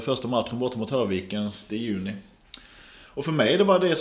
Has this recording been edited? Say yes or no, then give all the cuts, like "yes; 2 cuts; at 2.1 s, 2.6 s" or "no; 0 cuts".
yes; 1 cut; at 1.7 s